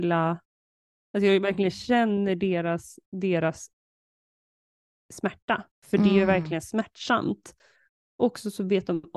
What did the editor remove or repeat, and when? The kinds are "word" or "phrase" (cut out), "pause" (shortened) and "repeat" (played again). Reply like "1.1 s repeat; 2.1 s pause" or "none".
none